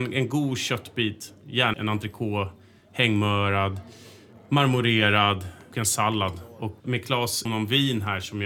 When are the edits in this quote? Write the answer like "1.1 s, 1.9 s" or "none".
1.7 s, 5.7 s, 6.8 s, 7.4 s